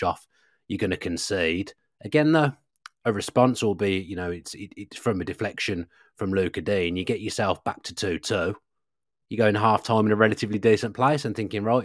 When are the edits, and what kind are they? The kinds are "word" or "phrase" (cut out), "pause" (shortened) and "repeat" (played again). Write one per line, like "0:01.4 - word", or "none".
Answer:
none